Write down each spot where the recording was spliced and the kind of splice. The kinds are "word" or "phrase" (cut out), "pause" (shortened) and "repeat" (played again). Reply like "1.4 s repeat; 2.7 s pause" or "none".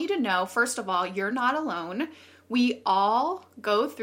none